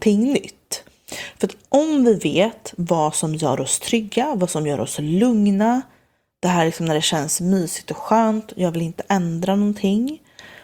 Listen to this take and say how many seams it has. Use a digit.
0